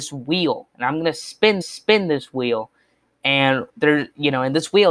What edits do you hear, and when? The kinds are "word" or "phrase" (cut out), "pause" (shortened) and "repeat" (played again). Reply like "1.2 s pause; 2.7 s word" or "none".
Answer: 1.6 s repeat; 3.7 s pause